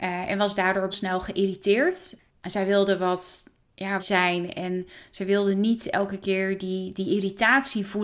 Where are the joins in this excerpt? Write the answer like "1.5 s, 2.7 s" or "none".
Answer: 0.9 s, 4.0 s